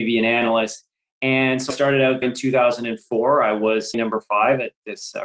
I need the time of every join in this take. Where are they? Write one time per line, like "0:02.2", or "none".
0:01.7
0:02.2
0:03.9